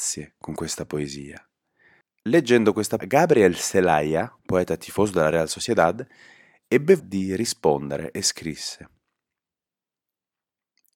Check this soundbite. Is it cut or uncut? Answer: cut